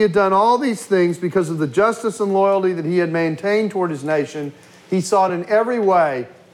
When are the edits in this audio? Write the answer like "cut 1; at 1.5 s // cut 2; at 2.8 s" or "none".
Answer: none